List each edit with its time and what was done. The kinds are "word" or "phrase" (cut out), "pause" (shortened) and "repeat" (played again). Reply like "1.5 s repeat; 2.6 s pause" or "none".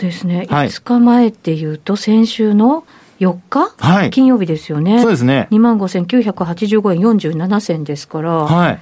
none